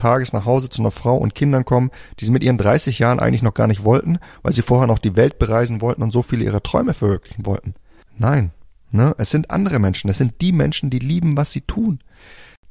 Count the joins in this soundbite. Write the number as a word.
zero